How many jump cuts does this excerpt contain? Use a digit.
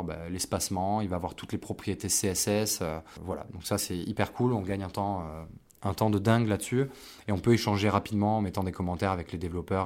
0